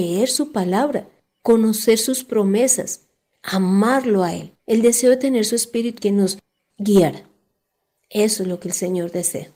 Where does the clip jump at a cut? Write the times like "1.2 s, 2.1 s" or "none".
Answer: 4.6 s, 6.0 s